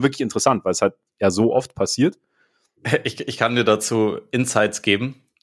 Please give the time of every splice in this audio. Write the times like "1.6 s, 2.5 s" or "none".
none